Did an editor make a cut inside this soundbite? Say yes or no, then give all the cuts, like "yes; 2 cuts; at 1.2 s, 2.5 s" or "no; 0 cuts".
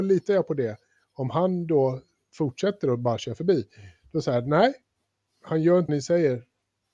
yes; 1 cut; at 5.9 s